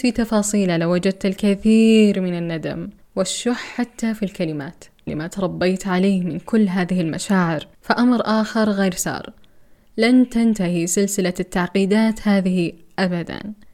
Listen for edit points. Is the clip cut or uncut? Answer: cut